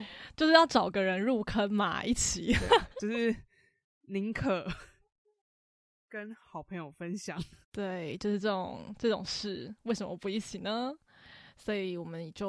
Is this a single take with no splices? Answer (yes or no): no